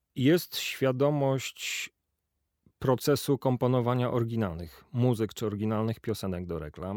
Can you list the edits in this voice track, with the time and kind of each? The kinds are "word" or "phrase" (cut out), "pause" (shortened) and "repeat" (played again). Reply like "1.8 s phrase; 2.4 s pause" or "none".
none